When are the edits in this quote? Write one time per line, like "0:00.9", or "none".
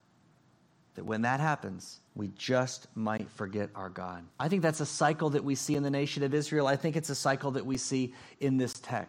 0:02.1
0:04.3